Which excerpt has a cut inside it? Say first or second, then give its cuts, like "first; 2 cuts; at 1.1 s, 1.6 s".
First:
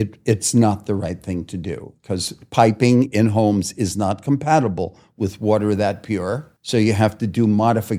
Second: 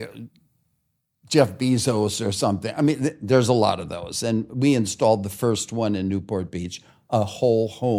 first; 1 cut; at 6.6 s